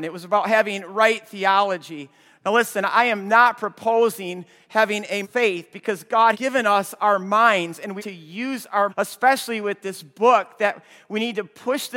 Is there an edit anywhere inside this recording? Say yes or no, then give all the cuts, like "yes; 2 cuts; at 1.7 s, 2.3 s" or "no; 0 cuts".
yes; 4 cuts; at 5.2 s, 6.3 s, 8.0 s, 8.9 s